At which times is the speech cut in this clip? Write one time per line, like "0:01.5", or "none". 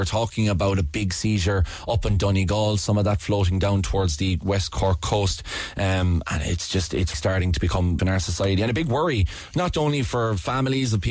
0:07.1
0:08.0